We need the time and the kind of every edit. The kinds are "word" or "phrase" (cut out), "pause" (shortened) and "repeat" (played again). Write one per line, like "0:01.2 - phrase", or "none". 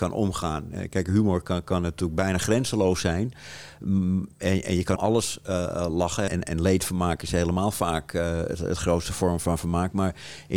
0:05.0 - word
0:06.3 - word